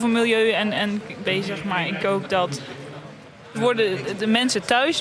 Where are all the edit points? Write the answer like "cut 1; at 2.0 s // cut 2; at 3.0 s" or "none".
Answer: cut 1; at 1.2 s // cut 2; at 2.0 s // cut 3; at 3.5 s

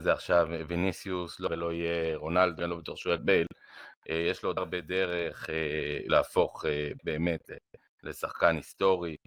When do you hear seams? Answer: cut 1; at 1.5 s // cut 2; at 2.6 s // cut 3; at 3.2 s // cut 4; at 4.6 s // cut 5; at 6.1 s // cut 6; at 7.0 s

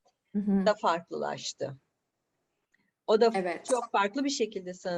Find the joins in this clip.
none

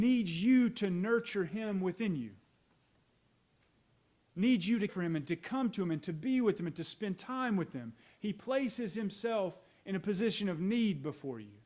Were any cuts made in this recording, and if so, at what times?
cut 1; at 4.9 s

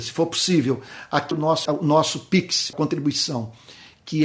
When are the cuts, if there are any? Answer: cut 1; at 1.3 s // cut 2; at 1.7 s // cut 3; at 2.7 s

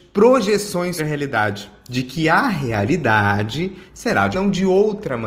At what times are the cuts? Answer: cut 1; at 1.0 s // cut 2; at 4.3 s

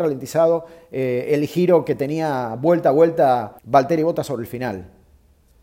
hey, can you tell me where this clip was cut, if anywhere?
cut 1; at 3.6 s

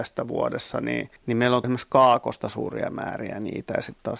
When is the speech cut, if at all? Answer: cut 1; at 1.2 s // cut 2; at 1.6 s

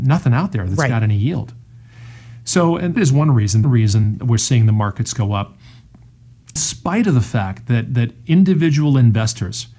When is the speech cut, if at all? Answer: cut 1; at 3.0 s // cut 2; at 3.6 s // cut 3; at 6.6 s

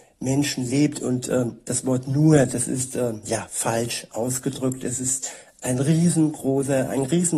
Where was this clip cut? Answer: none

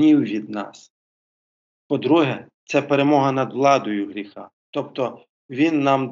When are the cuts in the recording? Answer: cut 1; at 2.5 s

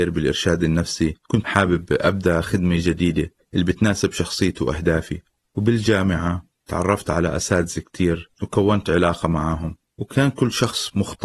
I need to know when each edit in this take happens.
cut 1; at 1.2 s

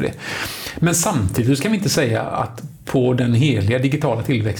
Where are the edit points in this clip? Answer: none

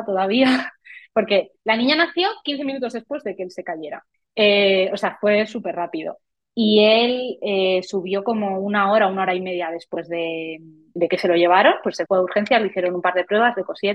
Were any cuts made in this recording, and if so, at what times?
cut 1; at 4.1 s // cut 2; at 11.0 s // cut 3; at 12.1 s

